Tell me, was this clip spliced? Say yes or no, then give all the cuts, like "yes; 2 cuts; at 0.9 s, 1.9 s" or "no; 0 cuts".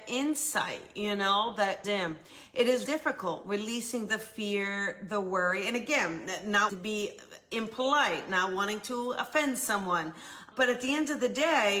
yes; 3 cuts; at 1.8 s, 2.9 s, 6.7 s